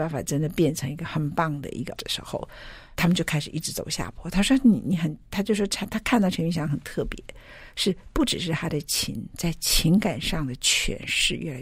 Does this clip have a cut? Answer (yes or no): yes